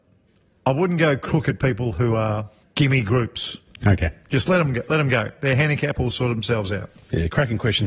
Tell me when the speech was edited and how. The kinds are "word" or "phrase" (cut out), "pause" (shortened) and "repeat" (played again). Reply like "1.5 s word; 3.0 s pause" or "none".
2.6 s pause